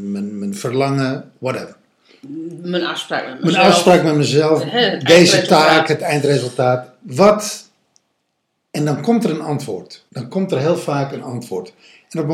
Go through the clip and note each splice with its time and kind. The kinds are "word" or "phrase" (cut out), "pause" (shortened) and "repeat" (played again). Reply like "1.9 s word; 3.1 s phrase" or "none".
10.1 s pause